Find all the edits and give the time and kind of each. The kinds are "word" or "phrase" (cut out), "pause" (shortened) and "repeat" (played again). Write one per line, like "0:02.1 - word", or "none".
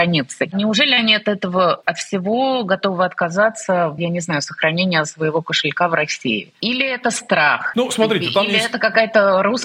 0:04.0 - word